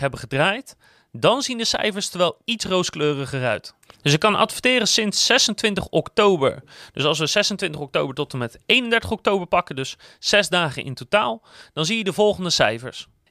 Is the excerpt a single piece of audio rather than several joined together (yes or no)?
yes